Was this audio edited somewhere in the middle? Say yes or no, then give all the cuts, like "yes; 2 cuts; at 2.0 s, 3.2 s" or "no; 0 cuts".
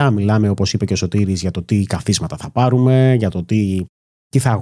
no; 0 cuts